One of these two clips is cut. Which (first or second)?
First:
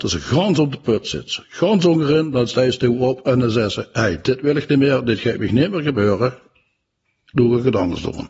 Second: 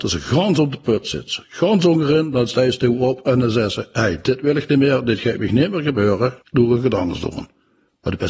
second